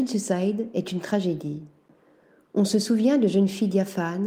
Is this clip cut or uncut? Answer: uncut